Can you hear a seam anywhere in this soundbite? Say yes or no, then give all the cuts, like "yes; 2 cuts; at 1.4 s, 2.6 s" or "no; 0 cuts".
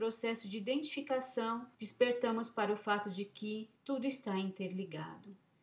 yes; 2 cuts; at 1.7 s, 3.8 s